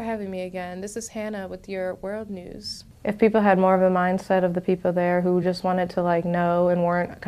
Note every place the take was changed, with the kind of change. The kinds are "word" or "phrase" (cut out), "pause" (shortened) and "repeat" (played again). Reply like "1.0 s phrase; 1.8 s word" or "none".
none